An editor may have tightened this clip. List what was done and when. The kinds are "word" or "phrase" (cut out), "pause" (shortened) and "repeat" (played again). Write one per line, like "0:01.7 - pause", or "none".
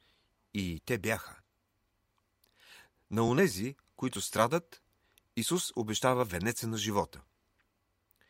none